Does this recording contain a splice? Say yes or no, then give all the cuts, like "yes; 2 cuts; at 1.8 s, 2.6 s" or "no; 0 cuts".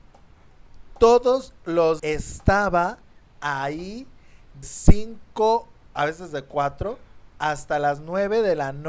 yes; 2 cuts; at 2.0 s, 4.6 s